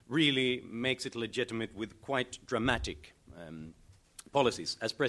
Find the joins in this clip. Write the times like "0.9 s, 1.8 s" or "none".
none